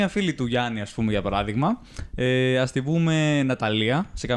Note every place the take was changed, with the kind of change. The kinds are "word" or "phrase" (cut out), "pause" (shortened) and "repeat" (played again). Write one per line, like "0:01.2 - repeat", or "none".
none